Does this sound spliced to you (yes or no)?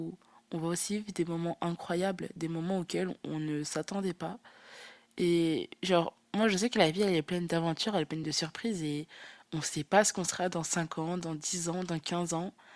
no